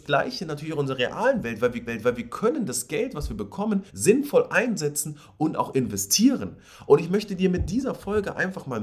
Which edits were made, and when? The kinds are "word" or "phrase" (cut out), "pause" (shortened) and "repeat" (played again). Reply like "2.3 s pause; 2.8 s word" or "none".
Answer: 1.9 s repeat; 3.9 s pause